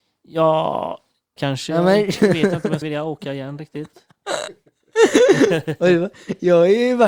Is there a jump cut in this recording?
yes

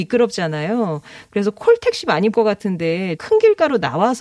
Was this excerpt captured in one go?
no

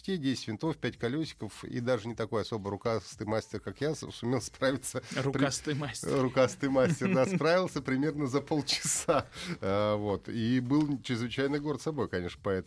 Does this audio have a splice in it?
no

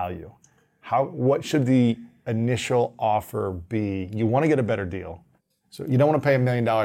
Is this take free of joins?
no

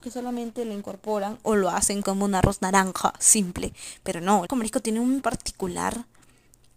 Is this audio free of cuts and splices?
no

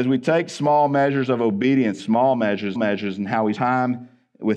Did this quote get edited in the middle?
yes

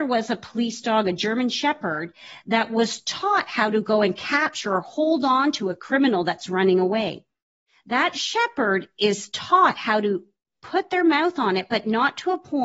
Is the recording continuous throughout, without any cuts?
yes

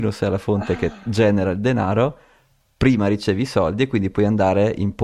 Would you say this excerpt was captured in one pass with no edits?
yes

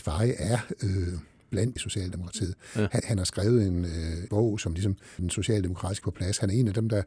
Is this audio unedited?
no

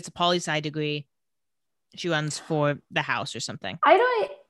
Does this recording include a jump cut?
no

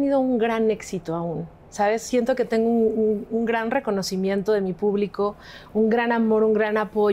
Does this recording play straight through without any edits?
yes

